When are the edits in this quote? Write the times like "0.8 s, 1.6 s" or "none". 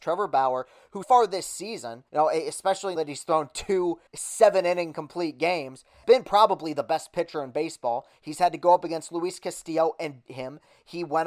1.0 s, 2.1 s, 3.0 s, 4.1 s, 6.0 s, 10.3 s